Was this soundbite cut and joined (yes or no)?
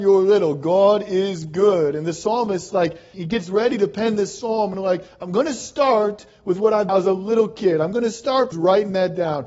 yes